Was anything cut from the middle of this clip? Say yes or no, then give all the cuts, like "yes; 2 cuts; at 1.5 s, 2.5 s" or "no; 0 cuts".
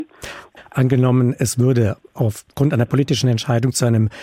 no; 0 cuts